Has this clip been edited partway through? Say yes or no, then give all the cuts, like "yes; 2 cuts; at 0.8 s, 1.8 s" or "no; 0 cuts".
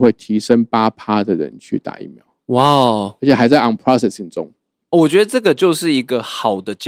no; 0 cuts